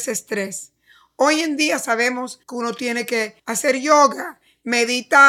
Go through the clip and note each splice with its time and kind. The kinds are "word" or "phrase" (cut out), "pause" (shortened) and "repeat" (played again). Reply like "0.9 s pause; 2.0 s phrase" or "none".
2.4 s pause; 3.4 s pause